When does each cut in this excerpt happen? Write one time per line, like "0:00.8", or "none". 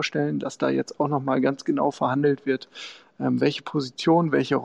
none